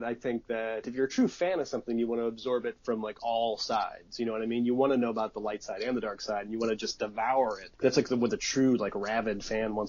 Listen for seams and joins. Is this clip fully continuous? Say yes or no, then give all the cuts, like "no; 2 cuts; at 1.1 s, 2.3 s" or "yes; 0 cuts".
no; 1 cut; at 7.7 s